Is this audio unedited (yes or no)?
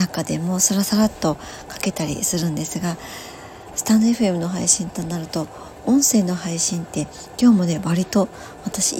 yes